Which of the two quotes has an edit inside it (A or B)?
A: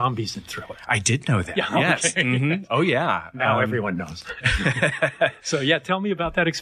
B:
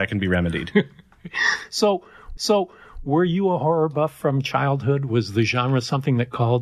B